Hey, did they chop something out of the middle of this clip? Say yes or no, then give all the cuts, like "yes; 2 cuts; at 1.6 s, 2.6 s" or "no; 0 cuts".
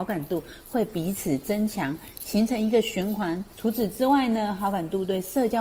yes; 1 cut; at 3.5 s